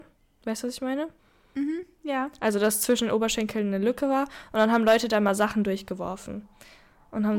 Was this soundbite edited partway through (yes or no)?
yes